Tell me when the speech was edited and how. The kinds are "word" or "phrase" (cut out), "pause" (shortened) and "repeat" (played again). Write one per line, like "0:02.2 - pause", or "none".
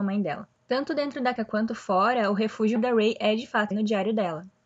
0:01.4 - word
0:02.8 - word
0:03.7 - word